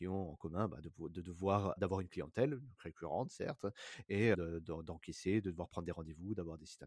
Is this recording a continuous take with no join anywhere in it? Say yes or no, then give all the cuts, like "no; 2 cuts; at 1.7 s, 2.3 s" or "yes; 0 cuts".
no; 2 cuts; at 1.8 s, 4.3 s